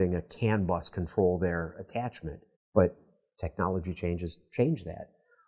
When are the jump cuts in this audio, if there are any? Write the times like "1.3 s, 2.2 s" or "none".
2.6 s